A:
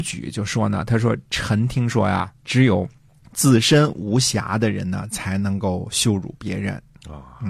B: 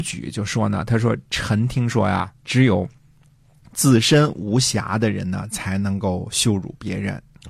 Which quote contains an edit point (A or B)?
A